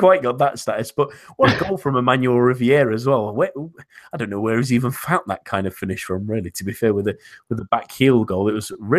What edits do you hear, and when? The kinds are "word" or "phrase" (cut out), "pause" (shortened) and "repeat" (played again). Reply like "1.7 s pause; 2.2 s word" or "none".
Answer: none